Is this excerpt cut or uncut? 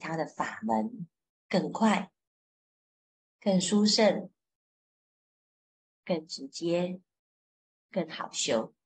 uncut